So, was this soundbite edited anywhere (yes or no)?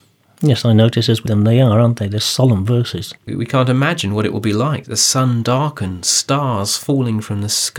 yes